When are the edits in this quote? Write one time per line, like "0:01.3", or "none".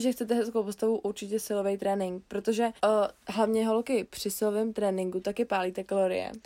0:02.8